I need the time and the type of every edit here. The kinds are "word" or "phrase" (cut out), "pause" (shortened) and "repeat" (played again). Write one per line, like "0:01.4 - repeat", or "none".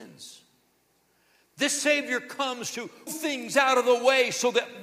0:03.1 - word